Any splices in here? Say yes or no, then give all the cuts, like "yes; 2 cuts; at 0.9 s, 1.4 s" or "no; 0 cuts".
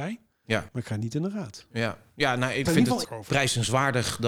yes; 2 cuts; at 2.7 s, 3.0 s